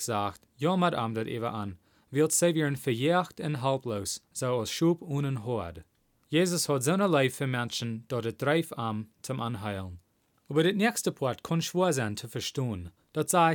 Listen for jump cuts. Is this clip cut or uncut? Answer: uncut